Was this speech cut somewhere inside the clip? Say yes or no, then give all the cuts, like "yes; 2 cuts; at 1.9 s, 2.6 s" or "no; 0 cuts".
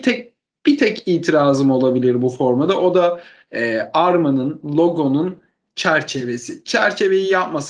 no; 0 cuts